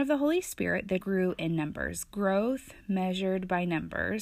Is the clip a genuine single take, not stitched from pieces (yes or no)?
no